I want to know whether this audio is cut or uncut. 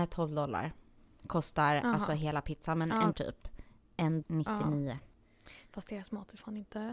cut